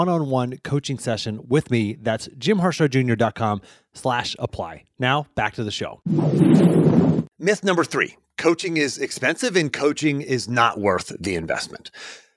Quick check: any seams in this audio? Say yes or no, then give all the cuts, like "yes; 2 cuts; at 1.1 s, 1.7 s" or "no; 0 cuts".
yes; 1 cut; at 7.3 s